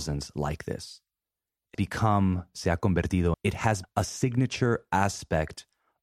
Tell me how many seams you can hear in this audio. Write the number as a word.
three